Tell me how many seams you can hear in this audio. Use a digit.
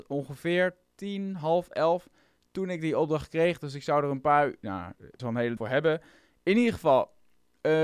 2